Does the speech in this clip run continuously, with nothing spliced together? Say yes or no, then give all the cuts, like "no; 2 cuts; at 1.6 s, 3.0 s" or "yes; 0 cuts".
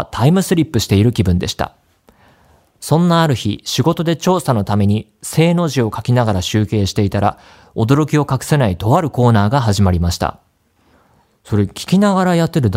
yes; 0 cuts